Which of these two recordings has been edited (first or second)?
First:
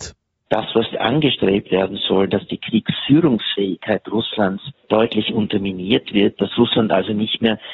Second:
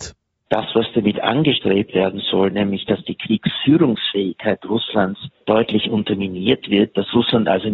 first